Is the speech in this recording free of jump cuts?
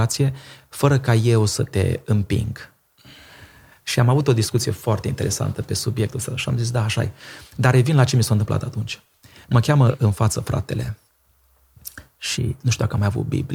yes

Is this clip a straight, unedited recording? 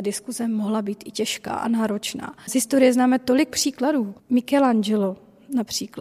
yes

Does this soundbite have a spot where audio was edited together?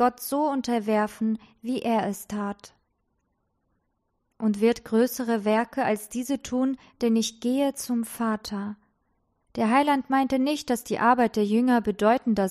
no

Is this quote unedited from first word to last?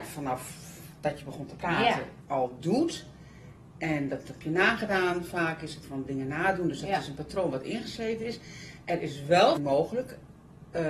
no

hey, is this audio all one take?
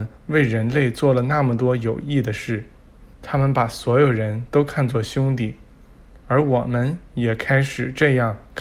no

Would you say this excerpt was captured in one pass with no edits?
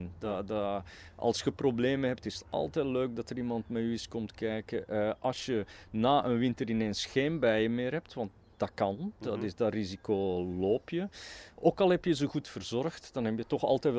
yes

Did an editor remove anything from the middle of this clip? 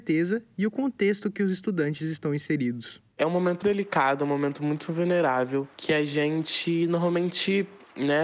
yes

